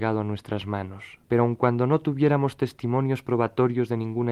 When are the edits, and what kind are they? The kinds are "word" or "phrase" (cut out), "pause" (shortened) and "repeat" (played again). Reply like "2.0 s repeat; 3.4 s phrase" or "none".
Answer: 1.2 s pause